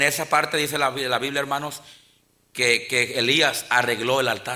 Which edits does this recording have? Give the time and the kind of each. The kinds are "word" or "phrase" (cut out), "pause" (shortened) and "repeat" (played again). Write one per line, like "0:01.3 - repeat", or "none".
none

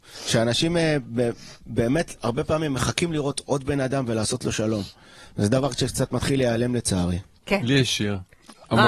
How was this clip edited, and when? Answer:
none

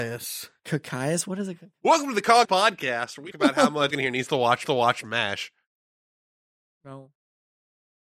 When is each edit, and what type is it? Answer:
0:02.4 - word
0:03.3 - word
0:03.9 - word
0:04.7 - repeat

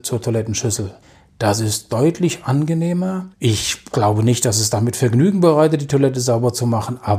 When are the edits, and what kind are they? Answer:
0:01.0 - pause
0:03.3 - pause

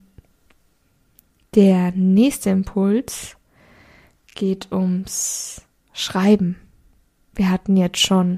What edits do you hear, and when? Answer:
none

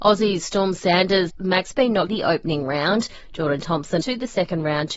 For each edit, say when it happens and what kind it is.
0:01.3 - word
0:01.7 - phrase
0:02.1 - phrase
0:04.0 - word

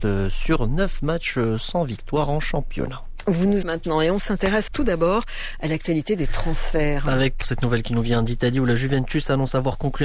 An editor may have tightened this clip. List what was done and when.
0:03.6 - phrase
0:04.7 - word
0:07.4 - word

